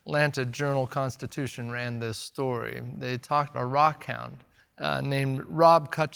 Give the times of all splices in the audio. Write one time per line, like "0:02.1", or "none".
0:03.5
0:04.6